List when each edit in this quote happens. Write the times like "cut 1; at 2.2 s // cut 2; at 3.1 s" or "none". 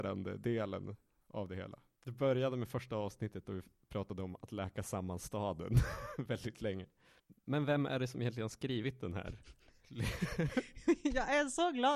none